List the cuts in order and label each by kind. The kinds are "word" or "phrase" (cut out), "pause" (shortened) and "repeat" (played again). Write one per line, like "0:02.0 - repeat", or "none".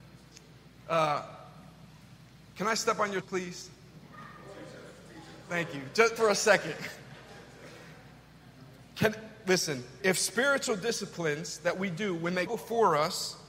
0:03.2 - word
0:06.2 - word
0:10.0 - word
0:12.5 - word